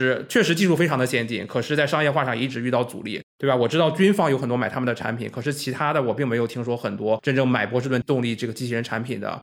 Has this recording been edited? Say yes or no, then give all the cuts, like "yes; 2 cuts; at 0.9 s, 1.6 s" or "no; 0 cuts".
yes; 1 cut; at 3.3 s